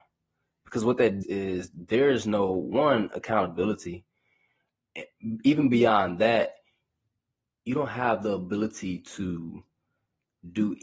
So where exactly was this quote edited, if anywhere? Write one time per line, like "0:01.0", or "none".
0:01.2